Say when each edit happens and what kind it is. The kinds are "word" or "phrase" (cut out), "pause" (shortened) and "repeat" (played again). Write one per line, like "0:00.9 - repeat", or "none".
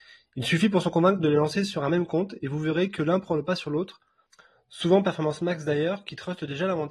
none